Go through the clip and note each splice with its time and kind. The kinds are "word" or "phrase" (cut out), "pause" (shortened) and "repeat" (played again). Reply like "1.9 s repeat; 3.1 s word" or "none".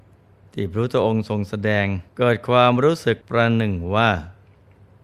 2.1 s pause; 3.2 s pause